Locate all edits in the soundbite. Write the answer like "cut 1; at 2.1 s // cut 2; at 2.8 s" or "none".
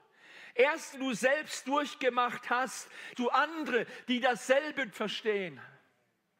cut 1; at 0.9 s // cut 2; at 1.6 s // cut 3; at 3.1 s // cut 4; at 4.9 s